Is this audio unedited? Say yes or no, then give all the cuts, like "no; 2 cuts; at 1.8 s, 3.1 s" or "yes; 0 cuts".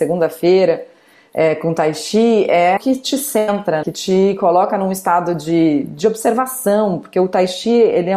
no; 2 cuts; at 2.8 s, 3.8 s